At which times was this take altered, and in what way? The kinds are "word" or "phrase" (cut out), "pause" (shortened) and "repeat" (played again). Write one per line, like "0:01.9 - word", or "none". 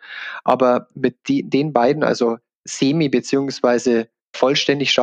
none